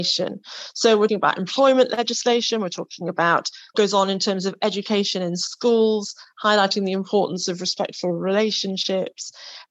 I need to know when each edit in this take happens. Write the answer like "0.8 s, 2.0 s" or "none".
1.1 s, 3.7 s